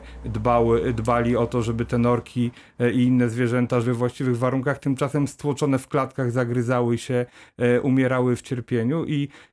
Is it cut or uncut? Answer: cut